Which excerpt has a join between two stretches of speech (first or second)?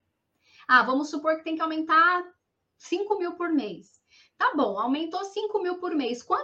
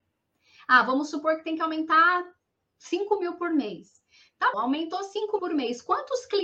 second